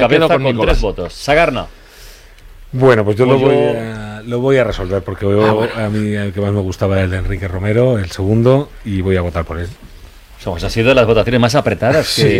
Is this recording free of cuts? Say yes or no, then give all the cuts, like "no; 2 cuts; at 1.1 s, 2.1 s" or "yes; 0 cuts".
yes; 0 cuts